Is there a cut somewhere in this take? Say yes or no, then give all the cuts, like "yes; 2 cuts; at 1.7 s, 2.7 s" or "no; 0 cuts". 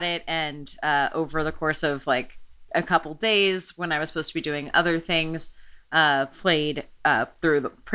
no; 0 cuts